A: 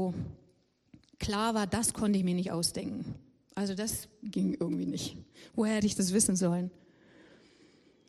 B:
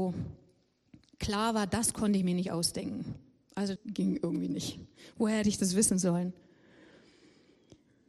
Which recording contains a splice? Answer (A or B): B